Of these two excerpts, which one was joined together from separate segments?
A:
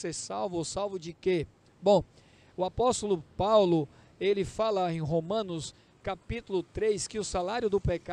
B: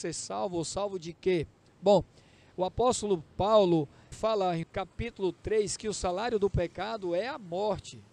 B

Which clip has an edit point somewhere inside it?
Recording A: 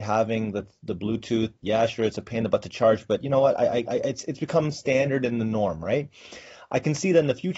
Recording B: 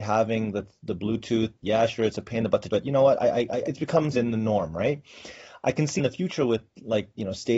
B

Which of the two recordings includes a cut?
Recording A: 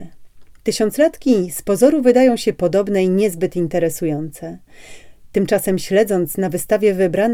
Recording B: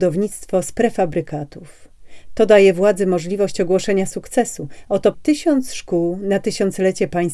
B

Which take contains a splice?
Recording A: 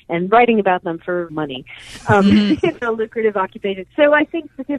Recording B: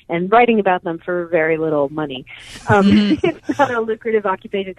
A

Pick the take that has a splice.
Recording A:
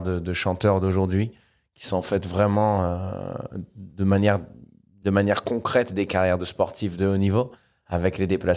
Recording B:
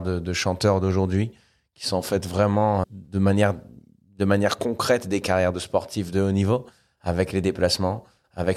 B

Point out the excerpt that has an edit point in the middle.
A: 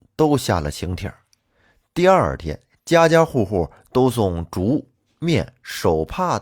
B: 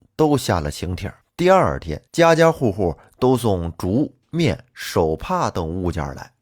B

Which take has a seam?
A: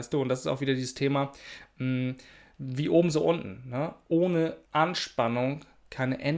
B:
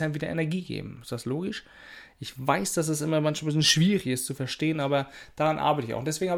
A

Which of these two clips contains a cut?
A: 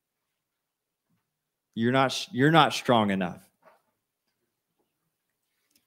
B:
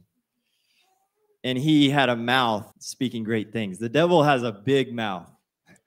B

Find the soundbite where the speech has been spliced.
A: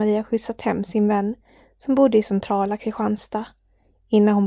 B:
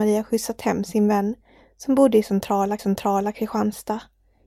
B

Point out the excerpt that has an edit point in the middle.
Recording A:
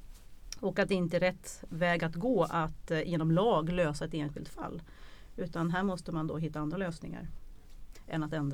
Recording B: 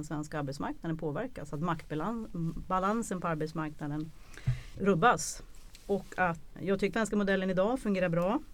B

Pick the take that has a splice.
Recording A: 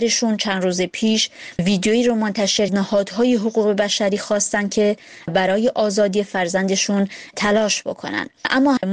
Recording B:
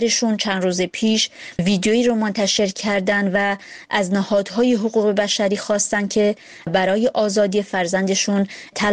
A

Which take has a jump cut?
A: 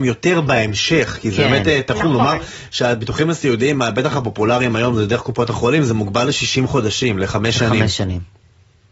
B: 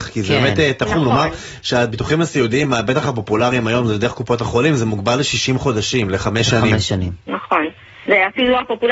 B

